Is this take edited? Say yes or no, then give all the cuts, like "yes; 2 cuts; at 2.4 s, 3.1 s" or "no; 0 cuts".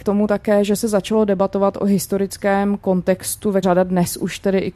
yes; 1 cut; at 3.6 s